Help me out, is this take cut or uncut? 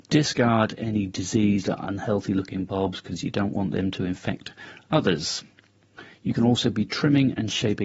uncut